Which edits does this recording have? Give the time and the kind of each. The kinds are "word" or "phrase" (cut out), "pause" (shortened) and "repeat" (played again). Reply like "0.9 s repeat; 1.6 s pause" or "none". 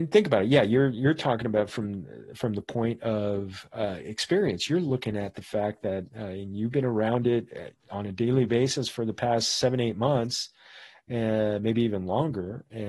none